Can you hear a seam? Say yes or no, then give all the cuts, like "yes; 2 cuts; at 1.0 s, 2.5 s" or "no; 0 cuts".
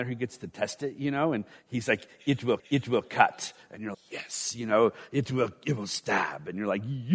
yes; 2 cuts; at 2.6 s, 3.9 s